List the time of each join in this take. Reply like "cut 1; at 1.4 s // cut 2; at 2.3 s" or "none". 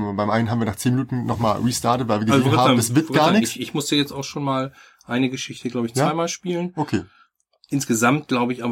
none